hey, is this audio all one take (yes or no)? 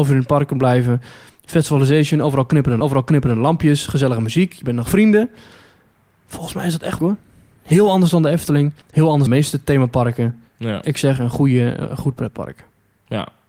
no